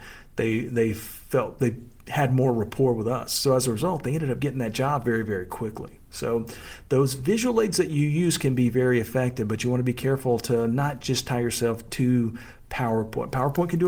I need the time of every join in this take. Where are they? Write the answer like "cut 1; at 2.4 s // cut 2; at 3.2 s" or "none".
none